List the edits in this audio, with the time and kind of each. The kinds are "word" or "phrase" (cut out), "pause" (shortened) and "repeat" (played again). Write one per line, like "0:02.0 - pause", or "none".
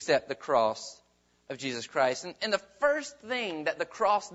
0:02.4 - word